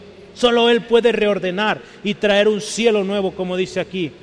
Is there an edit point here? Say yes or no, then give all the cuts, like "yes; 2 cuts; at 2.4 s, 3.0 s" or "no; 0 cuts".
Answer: no; 0 cuts